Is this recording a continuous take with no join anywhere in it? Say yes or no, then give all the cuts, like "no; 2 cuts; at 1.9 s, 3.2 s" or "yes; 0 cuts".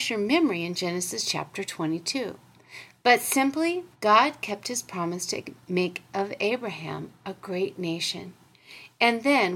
no; 1 cut; at 3.9 s